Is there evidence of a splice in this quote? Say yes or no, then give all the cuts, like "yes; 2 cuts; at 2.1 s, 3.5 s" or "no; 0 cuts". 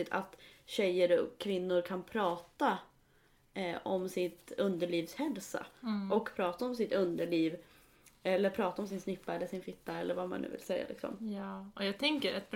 no; 0 cuts